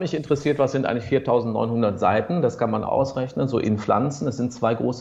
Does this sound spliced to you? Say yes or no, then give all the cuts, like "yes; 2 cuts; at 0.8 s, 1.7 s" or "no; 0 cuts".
yes; 1 cut; at 2.8 s